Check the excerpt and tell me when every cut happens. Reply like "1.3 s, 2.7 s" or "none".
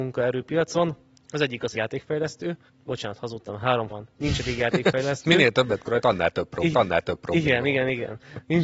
1.1 s, 1.7 s, 2.7 s, 3.9 s, 5.8 s, 6.7 s